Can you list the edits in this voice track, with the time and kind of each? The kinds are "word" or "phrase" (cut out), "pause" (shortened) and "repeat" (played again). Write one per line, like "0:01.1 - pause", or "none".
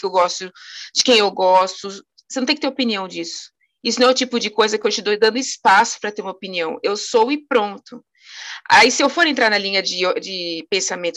none